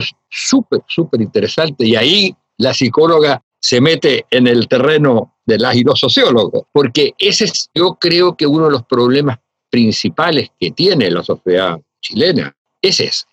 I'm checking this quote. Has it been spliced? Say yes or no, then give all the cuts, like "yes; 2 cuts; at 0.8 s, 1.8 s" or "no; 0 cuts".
no; 0 cuts